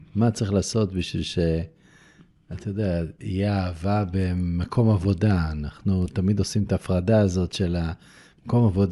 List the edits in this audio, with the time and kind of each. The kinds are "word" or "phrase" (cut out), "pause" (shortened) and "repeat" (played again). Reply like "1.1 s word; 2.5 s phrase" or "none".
none